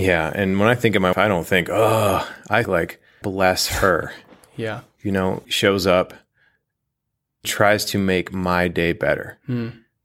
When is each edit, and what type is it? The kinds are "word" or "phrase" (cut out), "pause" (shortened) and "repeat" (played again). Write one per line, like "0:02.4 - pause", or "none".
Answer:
0:01.1 - word
0:02.6 - word
0:03.2 - word
0:05.4 - word
0:07.4 - word